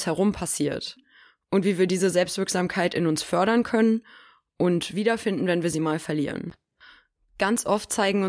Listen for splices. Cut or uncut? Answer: uncut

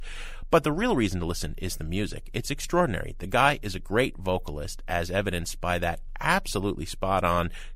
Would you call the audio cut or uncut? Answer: uncut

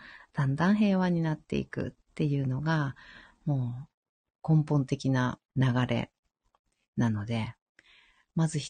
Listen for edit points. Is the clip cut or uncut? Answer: uncut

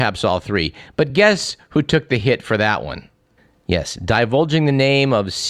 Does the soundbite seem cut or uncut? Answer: uncut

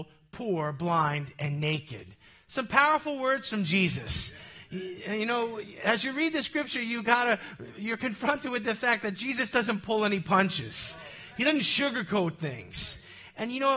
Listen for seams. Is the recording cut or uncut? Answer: uncut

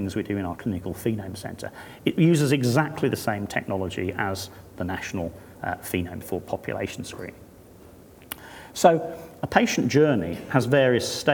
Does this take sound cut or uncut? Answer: cut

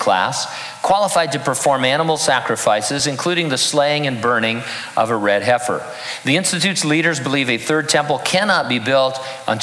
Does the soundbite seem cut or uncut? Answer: uncut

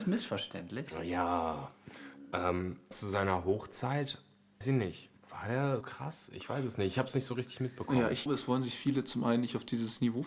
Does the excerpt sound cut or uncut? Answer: cut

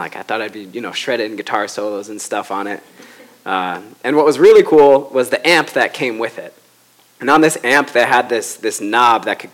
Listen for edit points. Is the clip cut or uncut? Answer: uncut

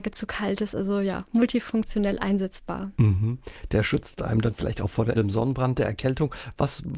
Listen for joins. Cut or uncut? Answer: cut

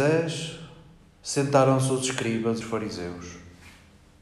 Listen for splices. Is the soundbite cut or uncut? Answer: cut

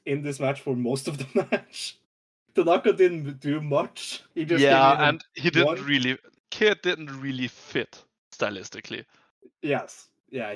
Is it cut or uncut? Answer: cut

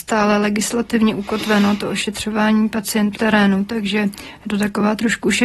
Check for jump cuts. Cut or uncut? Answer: cut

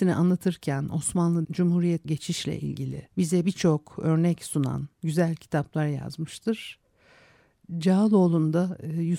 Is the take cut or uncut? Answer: cut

